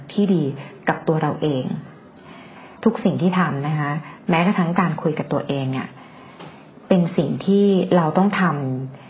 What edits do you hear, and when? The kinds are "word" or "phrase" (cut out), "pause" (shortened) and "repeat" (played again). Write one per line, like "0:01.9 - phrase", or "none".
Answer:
0:02.8 - pause
0:06.7 - pause